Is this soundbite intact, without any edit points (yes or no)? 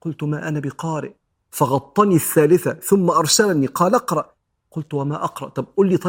yes